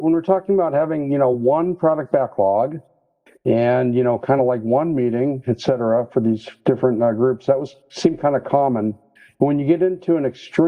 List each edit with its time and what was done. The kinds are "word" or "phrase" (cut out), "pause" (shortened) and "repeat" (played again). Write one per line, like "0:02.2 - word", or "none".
none

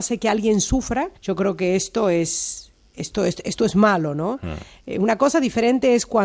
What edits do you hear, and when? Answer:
0:01.2 - pause

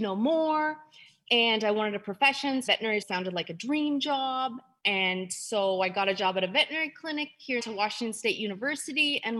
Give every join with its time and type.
0:02.7 - word
0:03.0 - word
0:07.6 - phrase

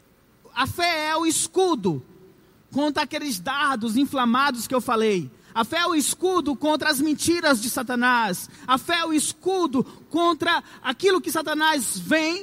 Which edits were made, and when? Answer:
none

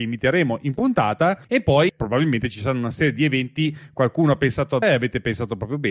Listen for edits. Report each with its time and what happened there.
0:01.4 - pause
0:04.8 - word

